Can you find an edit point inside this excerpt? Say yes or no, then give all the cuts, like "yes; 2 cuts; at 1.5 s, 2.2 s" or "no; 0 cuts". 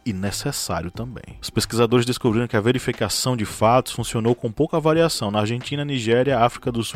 no; 0 cuts